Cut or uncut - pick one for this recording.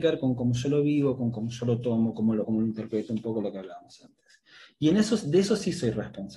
cut